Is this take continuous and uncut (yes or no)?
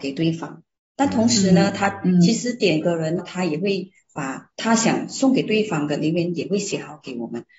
no